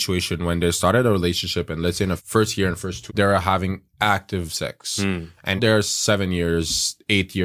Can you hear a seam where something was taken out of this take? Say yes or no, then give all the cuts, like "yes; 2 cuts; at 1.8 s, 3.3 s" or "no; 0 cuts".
yes; 3 cuts; at 2.2 s, 3.1 s, 5.6 s